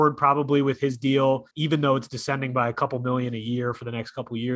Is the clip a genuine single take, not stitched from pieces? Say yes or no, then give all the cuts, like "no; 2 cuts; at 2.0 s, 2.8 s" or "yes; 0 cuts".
no; 1 cut; at 1.5 s